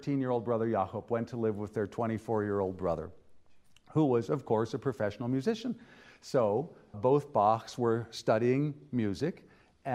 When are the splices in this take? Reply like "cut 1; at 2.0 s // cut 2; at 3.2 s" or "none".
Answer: cut 1; at 6.9 s